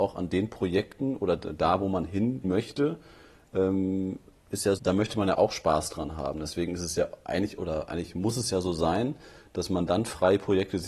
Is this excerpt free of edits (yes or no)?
no